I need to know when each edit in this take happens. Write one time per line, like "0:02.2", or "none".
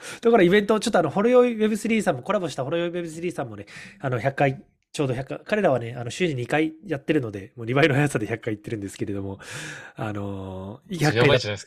none